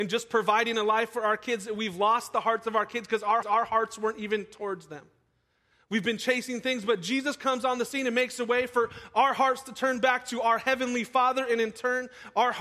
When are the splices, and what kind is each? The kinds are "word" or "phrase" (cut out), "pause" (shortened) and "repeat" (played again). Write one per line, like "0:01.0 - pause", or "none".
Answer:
0:03.4 - repeat